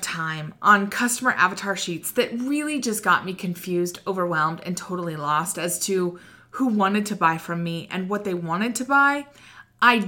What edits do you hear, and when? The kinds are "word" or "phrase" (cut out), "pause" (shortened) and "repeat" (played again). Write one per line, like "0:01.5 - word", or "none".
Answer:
none